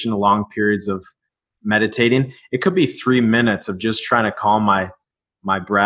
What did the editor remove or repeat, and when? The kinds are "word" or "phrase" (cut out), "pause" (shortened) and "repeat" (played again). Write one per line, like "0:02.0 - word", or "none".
none